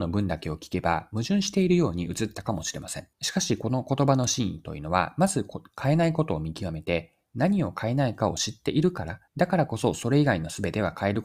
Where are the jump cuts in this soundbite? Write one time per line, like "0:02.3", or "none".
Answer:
0:03.1
0:09.3